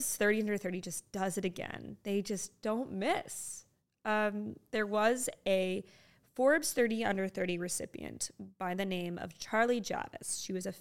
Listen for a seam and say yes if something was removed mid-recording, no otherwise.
no